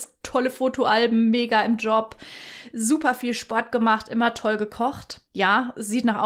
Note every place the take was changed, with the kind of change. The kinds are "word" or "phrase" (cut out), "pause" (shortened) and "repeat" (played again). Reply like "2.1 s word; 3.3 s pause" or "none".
5.3 s pause